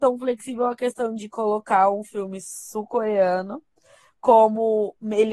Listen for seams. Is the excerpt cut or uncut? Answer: uncut